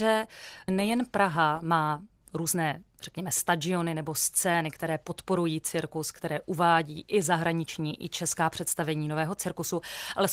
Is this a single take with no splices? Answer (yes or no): yes